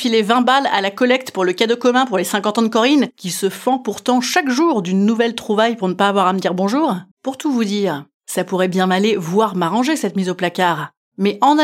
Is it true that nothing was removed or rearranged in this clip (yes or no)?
no